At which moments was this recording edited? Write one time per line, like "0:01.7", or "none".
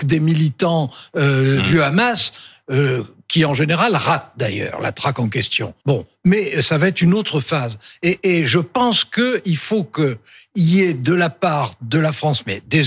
0:05.8